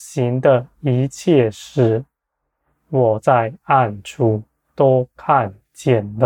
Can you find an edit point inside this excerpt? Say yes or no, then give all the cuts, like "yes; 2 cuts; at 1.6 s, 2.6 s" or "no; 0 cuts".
no; 0 cuts